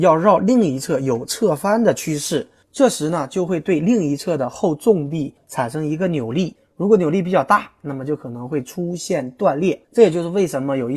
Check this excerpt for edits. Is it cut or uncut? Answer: cut